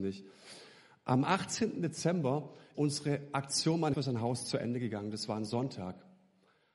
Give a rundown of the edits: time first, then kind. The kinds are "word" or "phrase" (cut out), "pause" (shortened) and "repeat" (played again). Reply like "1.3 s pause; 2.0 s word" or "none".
2.7 s word; 3.9 s word